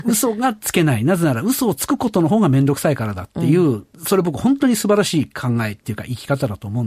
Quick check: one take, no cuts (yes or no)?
no